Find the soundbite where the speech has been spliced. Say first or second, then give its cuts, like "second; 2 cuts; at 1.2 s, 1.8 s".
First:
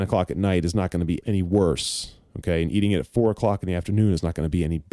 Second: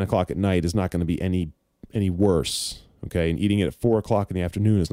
first; 1 cut; at 1.2 s